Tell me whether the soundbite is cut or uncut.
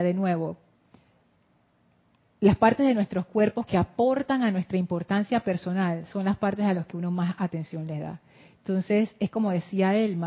uncut